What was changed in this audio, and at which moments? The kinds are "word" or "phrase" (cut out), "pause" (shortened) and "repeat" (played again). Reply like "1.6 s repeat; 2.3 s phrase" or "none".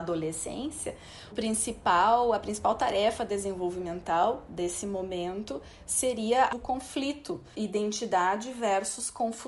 1.3 s word; 6.5 s word; 7.5 s word